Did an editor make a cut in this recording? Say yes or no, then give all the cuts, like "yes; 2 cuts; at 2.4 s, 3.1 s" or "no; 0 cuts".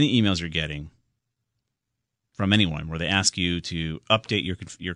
no; 0 cuts